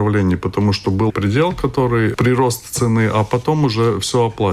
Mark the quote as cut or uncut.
cut